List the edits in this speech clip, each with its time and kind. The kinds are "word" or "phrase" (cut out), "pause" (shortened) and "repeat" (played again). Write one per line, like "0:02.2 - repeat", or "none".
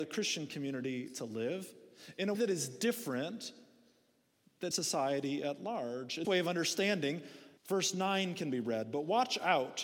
0:02.3 - word
0:04.7 - phrase
0:06.2 - word
0:07.6 - pause

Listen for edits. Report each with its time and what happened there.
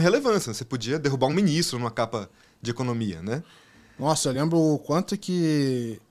none

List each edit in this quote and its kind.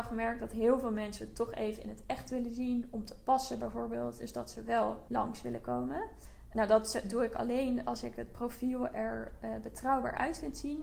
none

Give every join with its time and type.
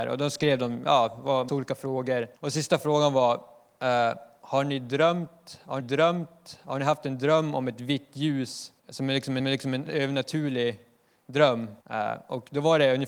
0:01.5 - word
0:02.4 - pause
0:05.8 - repeat
0:08.8 - pause
0:09.4 - repeat
0:11.8 - pause

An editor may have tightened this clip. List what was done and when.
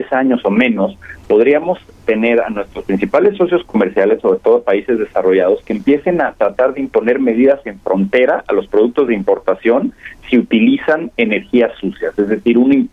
none

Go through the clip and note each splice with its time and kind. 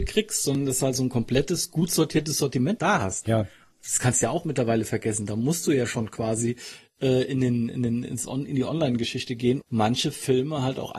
0:02.8 - word
0:09.6 - word

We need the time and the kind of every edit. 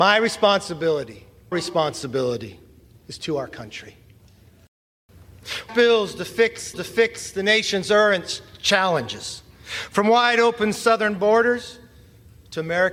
0:01.5 - word
0:05.7 - phrase
0:06.7 - repeat

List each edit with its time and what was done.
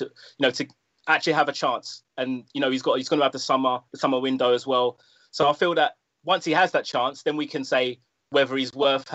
none

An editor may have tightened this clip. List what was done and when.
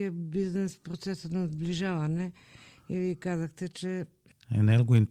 none

